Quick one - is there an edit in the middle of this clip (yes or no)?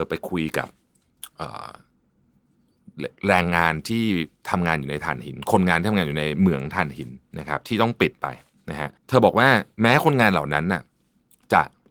yes